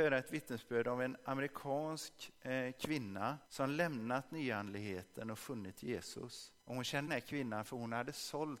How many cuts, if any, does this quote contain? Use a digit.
3